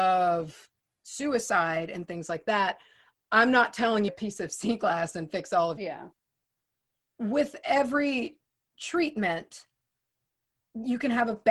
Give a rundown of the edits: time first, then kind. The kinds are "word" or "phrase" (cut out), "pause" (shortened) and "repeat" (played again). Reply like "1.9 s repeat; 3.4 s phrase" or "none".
4.1 s phrase; 5.8 s phrase